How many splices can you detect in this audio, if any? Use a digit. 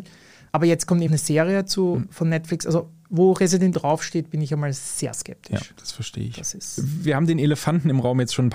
2